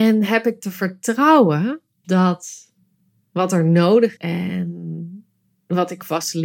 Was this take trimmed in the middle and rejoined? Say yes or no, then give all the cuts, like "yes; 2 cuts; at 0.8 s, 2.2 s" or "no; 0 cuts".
yes; 2 cuts; at 2.0 s, 4.2 s